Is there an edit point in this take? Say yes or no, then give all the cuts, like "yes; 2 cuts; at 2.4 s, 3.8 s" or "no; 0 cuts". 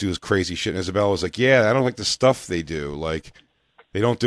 no; 0 cuts